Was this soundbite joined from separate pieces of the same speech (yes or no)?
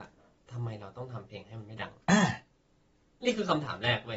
yes